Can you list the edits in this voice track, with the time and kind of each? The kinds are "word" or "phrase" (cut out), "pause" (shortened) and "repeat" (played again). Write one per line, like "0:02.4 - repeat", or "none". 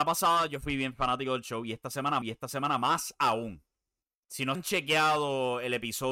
0:02.2 - repeat
0:04.0 - pause
0:04.5 - word